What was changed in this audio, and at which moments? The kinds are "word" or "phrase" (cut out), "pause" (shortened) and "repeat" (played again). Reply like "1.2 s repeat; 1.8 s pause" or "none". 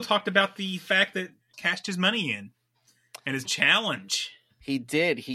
1.5 s word; 3.4 s phrase